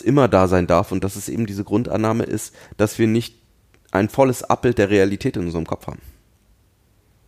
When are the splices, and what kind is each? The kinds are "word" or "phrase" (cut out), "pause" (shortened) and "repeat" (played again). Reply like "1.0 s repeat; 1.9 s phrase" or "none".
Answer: none

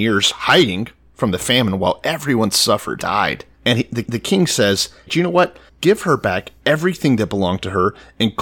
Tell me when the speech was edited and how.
3.0 s word; 3.5 s pause; 4.0 s repeat; 5.1 s word; 5.7 s pause

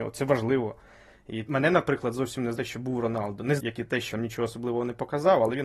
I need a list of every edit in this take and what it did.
1.5 s word; 2.6 s word; 3.6 s word; 4.1 s word

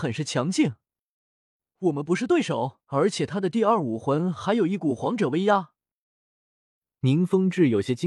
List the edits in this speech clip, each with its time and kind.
2.8 s pause

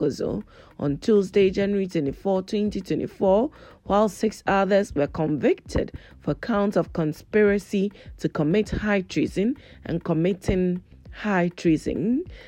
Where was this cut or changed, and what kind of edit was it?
none

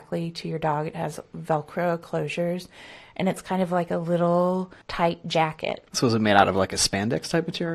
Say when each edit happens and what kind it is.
4.8 s pause; 5.9 s pause

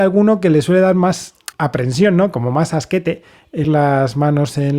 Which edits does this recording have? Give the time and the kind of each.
1.5 s pause; 3.6 s word

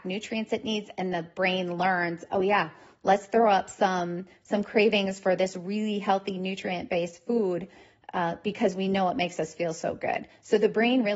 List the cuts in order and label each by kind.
none

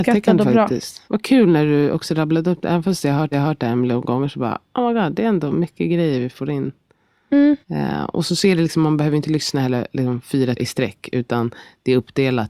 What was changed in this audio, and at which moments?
1.0 s pause; 3.3 s repeat; 7.6 s pause; 10.6 s word

